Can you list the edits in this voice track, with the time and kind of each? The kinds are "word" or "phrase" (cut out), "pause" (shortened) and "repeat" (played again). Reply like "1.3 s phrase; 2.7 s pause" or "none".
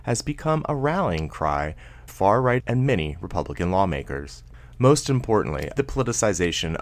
2.1 s word; 2.6 s word; 5.8 s word